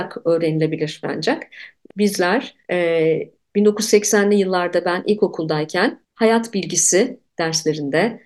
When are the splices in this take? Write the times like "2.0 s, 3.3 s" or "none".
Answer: 1.0 s, 1.9 s, 2.6 s, 6.0 s, 7.3 s